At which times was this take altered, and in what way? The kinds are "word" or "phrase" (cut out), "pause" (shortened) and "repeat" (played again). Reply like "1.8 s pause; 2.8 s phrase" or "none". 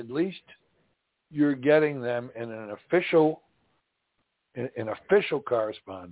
none